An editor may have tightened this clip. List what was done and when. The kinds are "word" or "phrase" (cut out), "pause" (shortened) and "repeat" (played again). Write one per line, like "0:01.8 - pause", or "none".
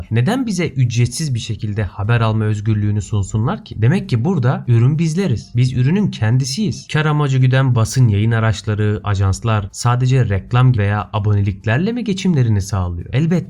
0:07.7 - word
0:10.7 - word